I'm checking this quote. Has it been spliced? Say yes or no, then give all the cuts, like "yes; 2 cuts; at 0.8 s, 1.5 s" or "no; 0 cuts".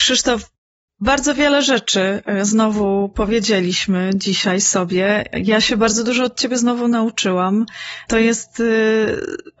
no; 0 cuts